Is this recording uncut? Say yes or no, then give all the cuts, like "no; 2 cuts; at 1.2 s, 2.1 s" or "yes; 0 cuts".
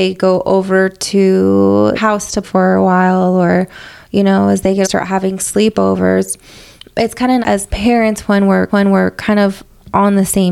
no; 5 cuts; at 2.0 s, 2.4 s, 4.8 s, 7.4 s, 8.7 s